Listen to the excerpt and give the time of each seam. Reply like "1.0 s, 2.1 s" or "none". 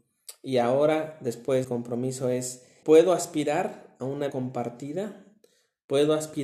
1.6 s, 2.8 s, 4.3 s